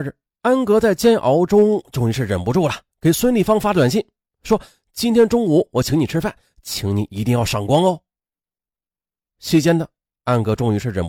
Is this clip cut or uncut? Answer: uncut